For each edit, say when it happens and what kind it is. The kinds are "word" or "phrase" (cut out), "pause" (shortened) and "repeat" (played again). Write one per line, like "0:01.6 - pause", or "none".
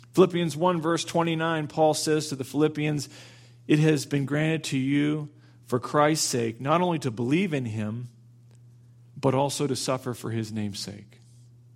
none